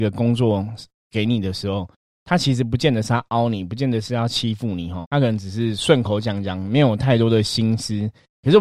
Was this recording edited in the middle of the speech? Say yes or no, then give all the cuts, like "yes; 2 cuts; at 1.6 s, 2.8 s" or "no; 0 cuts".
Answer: yes; 1 cut; at 5.0 s